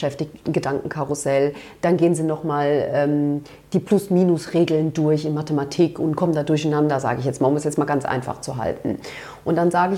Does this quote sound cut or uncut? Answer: uncut